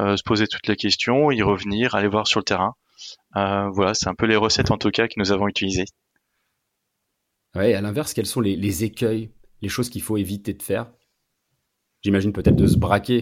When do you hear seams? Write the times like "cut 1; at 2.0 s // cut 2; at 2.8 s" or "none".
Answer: none